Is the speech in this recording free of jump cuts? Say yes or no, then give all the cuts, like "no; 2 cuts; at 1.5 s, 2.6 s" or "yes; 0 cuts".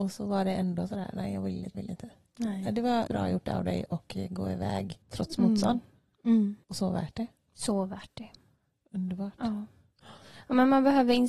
no; 4 cuts; at 1.7 s, 3.1 s, 5.0 s, 6.6 s